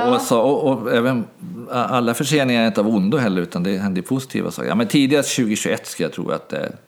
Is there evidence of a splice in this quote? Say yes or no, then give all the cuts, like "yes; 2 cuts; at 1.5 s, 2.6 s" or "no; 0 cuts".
no; 0 cuts